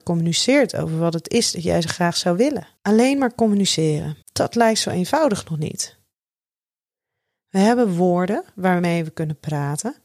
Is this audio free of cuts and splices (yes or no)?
no